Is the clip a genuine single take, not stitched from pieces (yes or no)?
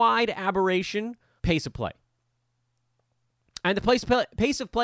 no